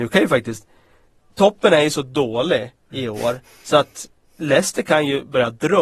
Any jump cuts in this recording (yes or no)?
no